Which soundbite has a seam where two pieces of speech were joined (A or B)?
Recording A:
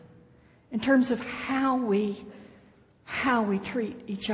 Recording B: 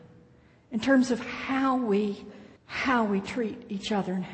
B